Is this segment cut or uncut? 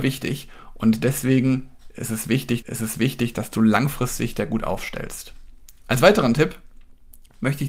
cut